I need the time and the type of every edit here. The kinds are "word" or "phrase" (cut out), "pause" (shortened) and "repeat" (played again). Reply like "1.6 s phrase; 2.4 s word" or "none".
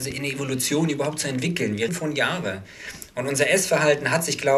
1.9 s phrase

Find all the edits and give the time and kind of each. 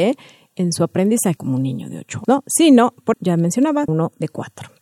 1.4 s word; 2.2 s word; 3.1 s word; 3.9 s word

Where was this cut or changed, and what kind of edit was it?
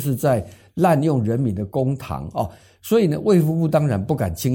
none

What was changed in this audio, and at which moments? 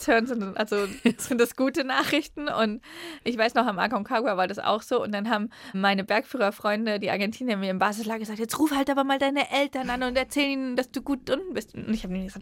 none

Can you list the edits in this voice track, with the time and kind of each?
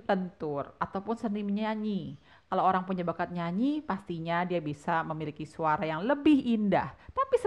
none

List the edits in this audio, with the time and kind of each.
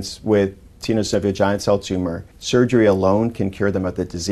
2.3 s pause

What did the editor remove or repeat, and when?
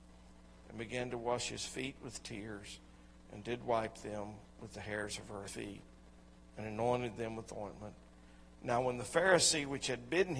5.5 s phrase

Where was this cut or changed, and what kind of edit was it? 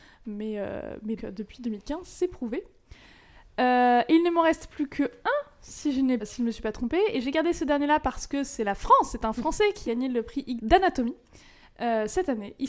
1.2 s word; 6.2 s word; 9.9 s word; 10.6 s word

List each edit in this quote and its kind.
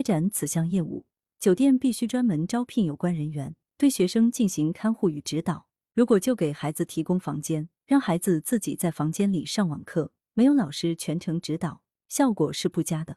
none

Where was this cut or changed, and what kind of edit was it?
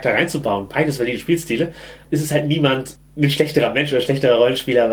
none

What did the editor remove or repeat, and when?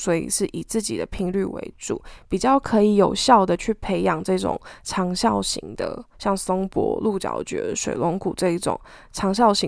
6.1 s pause

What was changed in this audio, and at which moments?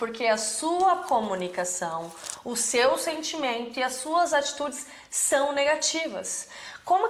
none

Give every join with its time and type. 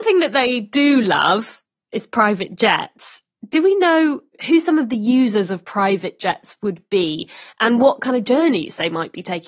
none

